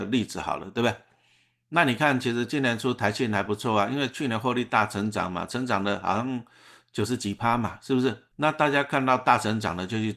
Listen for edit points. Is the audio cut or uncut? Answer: cut